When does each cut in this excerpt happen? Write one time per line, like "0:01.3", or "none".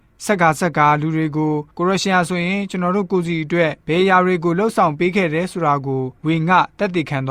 0:01.7
0:03.8
0:06.2